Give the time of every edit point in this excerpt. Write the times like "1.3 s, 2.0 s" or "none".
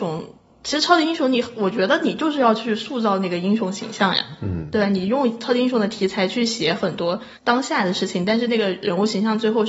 7.4 s